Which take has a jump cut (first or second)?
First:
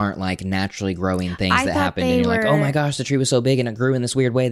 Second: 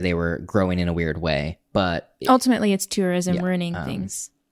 second